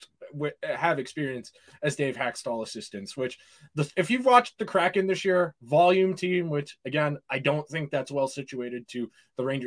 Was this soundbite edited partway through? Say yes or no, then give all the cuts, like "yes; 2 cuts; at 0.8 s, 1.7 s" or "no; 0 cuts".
no; 0 cuts